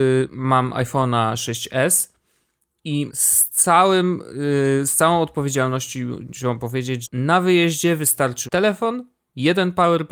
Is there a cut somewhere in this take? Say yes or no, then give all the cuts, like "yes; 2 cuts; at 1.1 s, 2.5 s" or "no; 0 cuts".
yes; 3 cuts; at 3.1 s, 7.0 s, 8.5 s